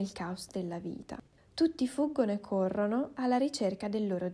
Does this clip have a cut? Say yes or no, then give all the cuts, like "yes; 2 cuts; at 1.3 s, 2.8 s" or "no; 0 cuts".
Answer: no; 0 cuts